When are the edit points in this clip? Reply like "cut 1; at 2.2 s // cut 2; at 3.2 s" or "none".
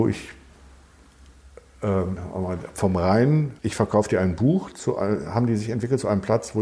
cut 1; at 3.6 s